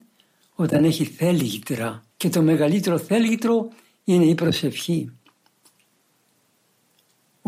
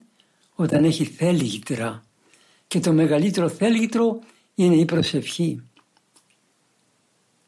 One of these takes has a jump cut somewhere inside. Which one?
first; 1 cut; at 2.1 s

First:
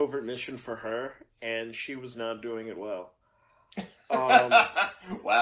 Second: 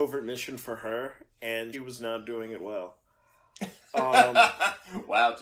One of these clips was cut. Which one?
second; 1 cut; at 1.7 s

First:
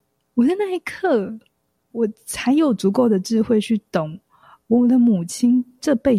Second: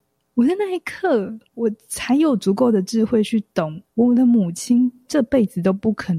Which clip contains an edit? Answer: second; 2 cuts; at 1.5 s, 3.9 s

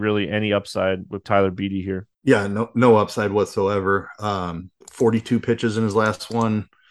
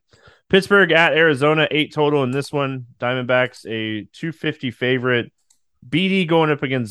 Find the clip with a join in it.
first; 3 cuts; at 1.2 s, 2.1 s, 4.8 s

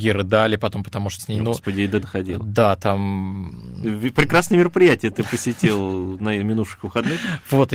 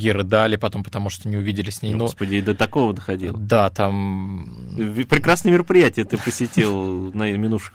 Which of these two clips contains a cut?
first; 2 cuts; at 1.2 s, 2.0 s

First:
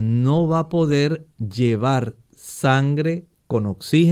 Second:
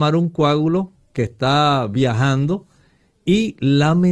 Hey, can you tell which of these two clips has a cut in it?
first; 1 cut; at 1.3 s

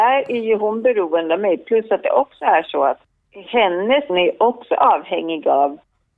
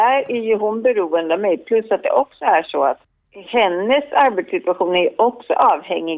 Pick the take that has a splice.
first; 1 cut; at 4.1 s

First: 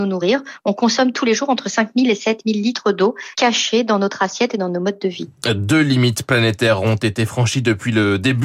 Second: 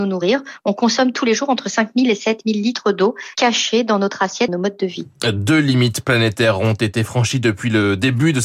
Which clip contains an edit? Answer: second; 1 cut; at 4.5 s

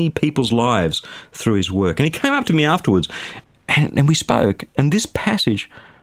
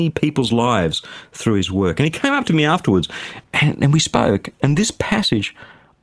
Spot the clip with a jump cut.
second; 1 cut; at 3.4 s

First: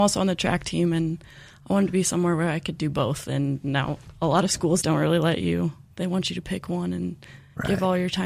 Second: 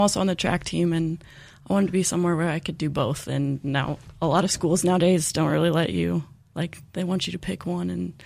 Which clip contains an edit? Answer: first; 2 cuts; at 4.8 s, 5.9 s

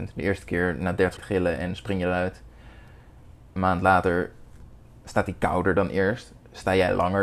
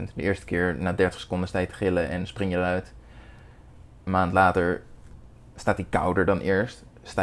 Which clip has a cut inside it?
first; 1 cut; at 1.2 s

